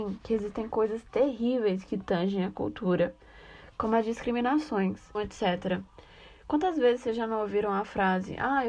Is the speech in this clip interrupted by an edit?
yes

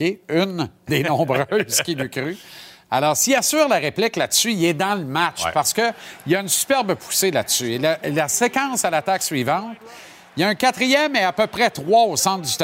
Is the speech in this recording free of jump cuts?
yes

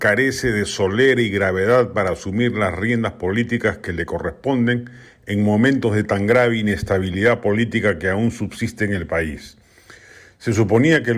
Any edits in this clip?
no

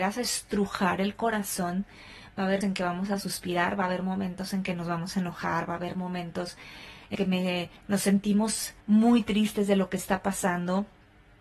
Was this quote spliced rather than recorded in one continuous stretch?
yes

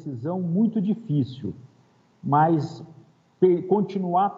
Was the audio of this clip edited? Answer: no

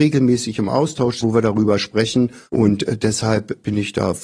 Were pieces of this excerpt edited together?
yes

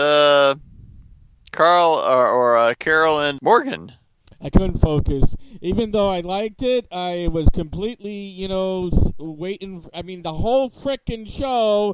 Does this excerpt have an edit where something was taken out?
no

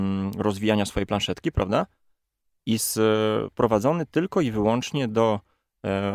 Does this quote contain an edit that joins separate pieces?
no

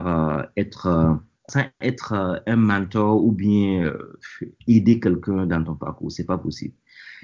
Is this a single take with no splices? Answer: no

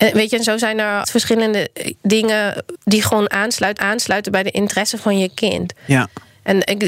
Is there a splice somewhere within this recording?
yes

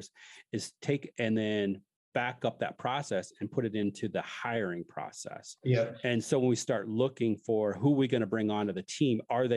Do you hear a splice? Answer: yes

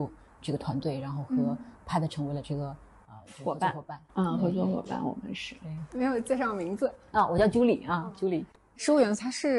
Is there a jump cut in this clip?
no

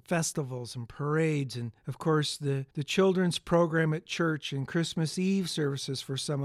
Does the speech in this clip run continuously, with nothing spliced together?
no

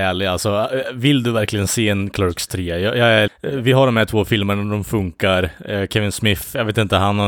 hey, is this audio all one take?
no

